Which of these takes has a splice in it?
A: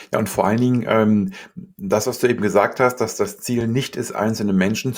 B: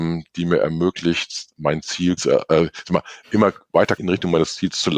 B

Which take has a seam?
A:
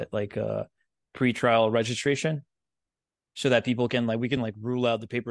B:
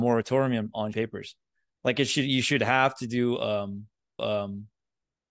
B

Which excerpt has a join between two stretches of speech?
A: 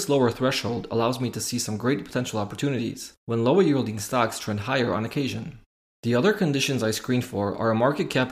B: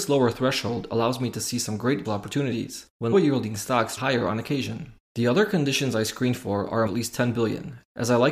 B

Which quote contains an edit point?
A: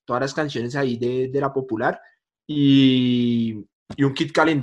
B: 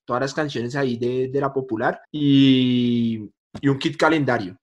B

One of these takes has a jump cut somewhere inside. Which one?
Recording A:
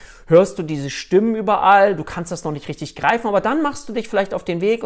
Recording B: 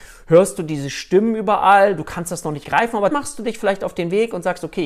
B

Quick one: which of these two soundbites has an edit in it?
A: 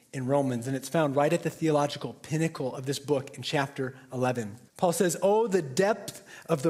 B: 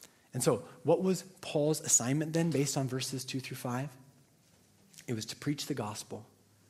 A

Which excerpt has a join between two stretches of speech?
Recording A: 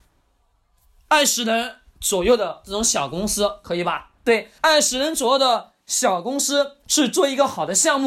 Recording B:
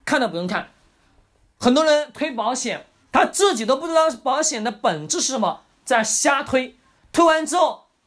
A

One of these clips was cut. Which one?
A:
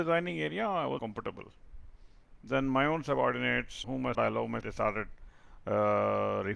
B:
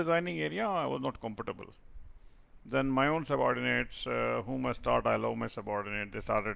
A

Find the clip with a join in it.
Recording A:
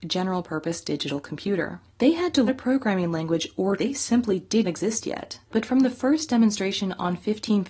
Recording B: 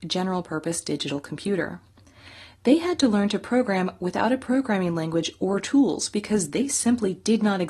A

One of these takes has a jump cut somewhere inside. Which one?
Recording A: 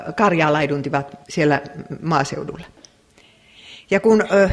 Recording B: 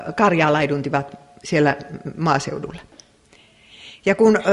A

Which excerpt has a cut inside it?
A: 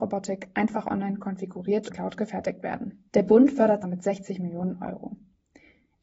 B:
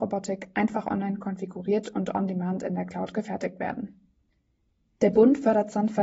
A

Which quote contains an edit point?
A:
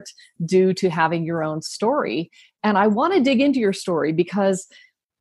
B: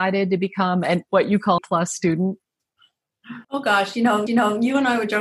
B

